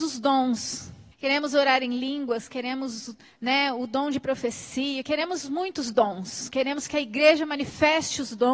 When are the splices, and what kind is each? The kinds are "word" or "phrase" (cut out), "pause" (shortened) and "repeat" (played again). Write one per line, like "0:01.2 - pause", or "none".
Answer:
0:01.1 - pause